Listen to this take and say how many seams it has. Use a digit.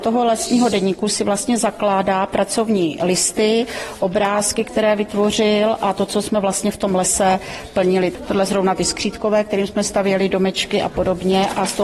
1